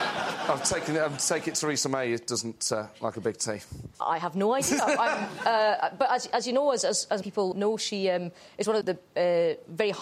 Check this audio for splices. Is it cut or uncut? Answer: cut